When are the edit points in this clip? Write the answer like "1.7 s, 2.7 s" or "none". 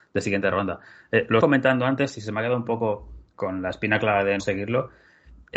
1.4 s, 4.4 s

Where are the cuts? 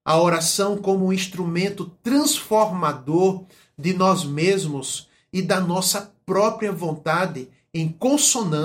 none

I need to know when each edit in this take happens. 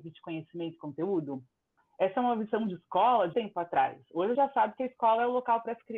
3.3 s, 4.3 s

